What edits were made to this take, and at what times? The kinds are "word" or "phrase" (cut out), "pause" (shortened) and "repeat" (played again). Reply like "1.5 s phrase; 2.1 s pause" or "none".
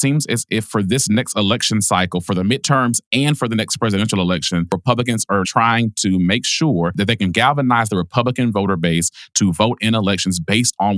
5.4 s word